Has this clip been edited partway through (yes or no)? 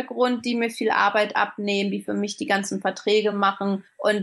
no